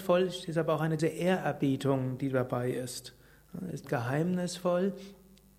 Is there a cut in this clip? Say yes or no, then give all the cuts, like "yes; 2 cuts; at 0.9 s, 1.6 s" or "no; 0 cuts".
yes; 2 cuts; at 1.0 s, 3.8 s